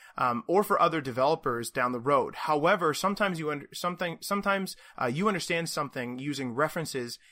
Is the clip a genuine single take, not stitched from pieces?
yes; 0 cuts

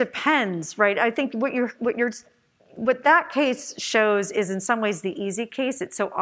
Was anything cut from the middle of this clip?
no; 0 cuts

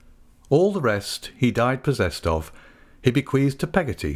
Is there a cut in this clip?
no; 0 cuts

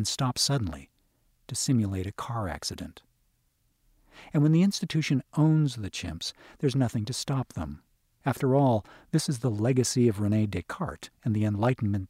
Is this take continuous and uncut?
yes; 0 cuts

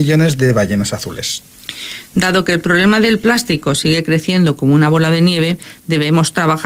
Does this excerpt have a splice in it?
no; 0 cuts

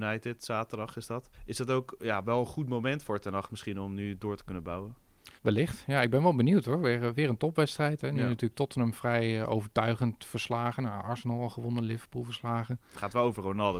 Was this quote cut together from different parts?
yes; 2 cuts; at 1.3 s, 5.4 s

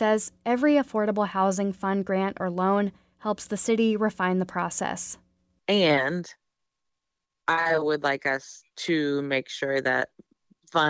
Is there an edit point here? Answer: no; 0 cuts

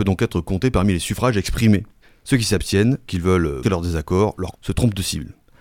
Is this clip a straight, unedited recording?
no; 4 cuts; at 2.0 s, 3.1 s, 3.6 s, 4.5 s

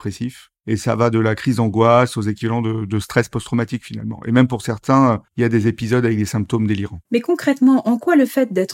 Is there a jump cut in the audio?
yes; 2 cuts; at 5.3 s, 7.1 s

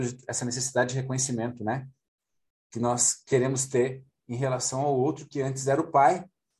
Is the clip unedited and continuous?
yes; 0 cuts

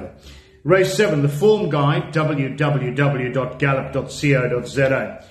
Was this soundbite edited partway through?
no; 0 cuts

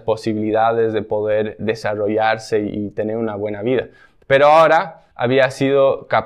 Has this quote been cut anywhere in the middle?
yes; 2 cuts; at 1.6 s, 5.1 s

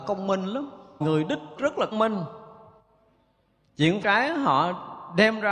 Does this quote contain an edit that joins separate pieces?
yes; 4 cuts; at 1.0 s, 1.6 s, 1.9 s, 4.0 s

